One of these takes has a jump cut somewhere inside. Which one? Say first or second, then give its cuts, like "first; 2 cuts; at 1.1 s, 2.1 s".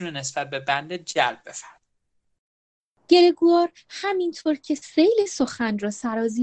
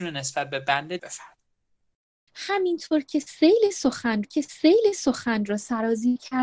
second; 3 cuts; at 1.0 s, 2.3 s, 4.2 s